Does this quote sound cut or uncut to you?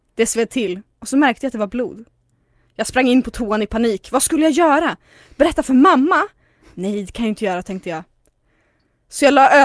uncut